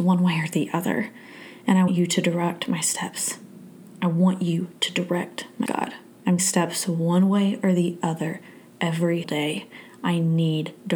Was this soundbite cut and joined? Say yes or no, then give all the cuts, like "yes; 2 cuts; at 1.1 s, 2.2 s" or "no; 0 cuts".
yes; 4 cuts; at 1.9 s, 5.7 s, 6.4 s, 9.2 s